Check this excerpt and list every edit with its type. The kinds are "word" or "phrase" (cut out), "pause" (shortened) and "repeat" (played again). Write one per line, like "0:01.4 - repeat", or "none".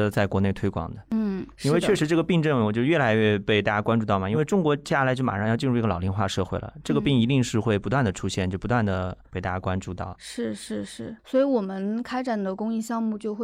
0:11.2 - pause

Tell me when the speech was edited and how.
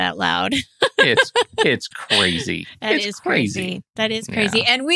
none

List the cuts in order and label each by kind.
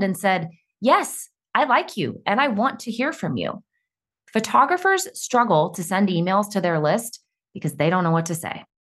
none

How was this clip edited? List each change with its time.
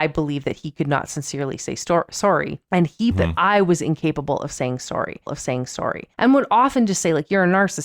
0:03.1 - word
0:05.3 - repeat

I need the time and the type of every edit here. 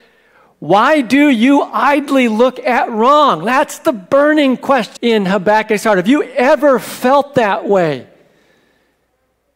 0:05.0 - word

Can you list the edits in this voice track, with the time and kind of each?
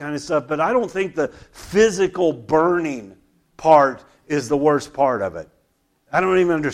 none

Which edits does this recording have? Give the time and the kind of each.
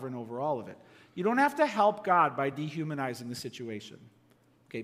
none

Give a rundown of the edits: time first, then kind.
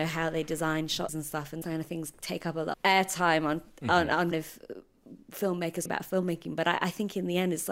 0:01.1 - word
0:01.6 - word
0:02.7 - word
0:04.3 - word
0:05.9 - word

